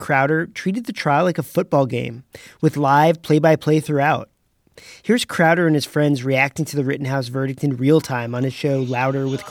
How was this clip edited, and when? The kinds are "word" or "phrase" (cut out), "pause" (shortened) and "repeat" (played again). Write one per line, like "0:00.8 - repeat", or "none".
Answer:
none